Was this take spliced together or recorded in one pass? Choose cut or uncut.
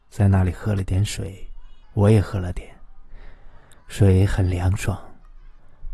cut